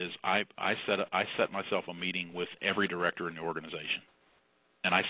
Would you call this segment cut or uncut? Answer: uncut